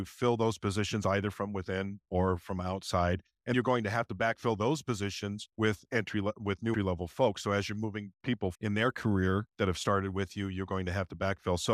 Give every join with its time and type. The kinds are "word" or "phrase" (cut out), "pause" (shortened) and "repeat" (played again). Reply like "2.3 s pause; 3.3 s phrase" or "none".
3.5 s word; 5.5 s pause; 6.7 s word; 8.5 s word; 9.5 s pause